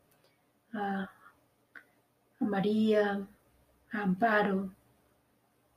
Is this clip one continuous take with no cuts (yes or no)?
yes